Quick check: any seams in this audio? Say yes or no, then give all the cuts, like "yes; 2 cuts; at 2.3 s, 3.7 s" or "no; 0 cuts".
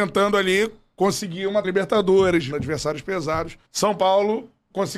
yes; 3 cuts; at 1.6 s, 2.5 s, 3.7 s